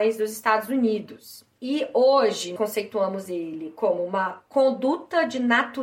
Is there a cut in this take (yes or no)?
yes